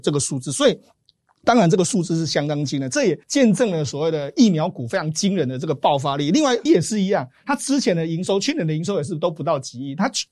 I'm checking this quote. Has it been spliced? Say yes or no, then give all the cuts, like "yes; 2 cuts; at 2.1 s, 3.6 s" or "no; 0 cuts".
yes; 2 cuts; at 3.2 s, 6.7 s